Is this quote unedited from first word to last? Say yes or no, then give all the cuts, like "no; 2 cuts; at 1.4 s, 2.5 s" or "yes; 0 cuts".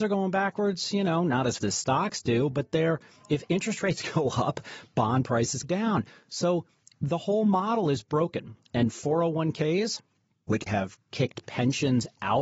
no; 3 cuts; at 1.6 s, 5.6 s, 10.7 s